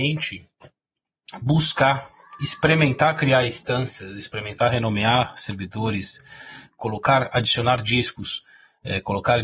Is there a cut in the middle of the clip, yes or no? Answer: no